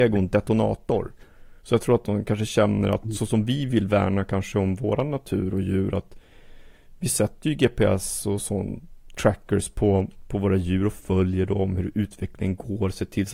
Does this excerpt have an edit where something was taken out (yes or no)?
yes